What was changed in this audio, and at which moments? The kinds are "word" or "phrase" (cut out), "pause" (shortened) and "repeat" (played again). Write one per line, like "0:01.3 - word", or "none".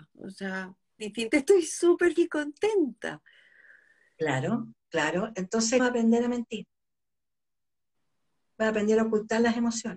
0:01.0 - word
0:01.3 - word
0:02.2 - word
0:05.8 - word